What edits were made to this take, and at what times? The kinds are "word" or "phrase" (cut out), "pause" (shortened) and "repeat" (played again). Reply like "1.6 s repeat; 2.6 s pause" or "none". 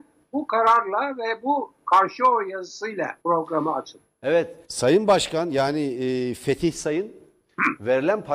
3.2 s pause; 4.6 s pause